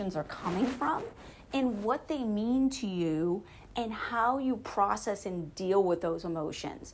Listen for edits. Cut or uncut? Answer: uncut